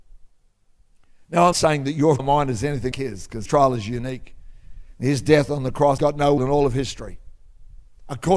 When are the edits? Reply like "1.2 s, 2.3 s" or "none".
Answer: 1.5 s, 2.2 s, 2.9 s, 3.5 s, 6.0 s, 6.4 s